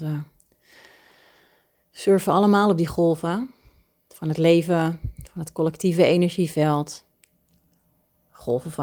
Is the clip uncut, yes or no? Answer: yes